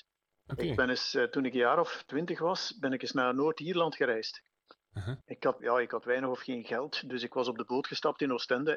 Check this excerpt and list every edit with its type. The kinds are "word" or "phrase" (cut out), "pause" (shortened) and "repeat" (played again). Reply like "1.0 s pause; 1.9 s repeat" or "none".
5.2 s pause; 5.6 s word